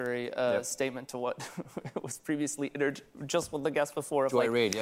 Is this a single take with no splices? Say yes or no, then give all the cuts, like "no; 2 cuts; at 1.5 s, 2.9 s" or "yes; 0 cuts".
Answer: yes; 0 cuts